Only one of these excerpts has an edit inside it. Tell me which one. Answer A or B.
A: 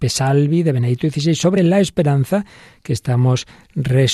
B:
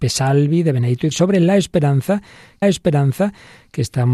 B